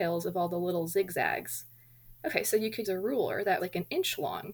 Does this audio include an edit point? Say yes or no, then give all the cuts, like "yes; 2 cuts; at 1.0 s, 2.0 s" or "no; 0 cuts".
yes; 2 cuts; at 2.8 s, 3.6 s